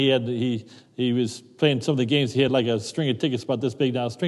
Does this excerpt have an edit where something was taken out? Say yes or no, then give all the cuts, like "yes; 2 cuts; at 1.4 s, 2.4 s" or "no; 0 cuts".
no; 0 cuts